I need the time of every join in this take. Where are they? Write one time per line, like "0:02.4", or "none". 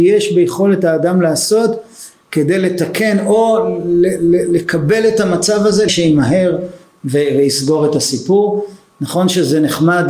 0:05.9